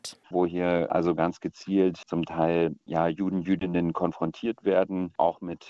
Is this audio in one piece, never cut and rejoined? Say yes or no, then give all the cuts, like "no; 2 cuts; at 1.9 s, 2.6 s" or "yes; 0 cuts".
yes; 0 cuts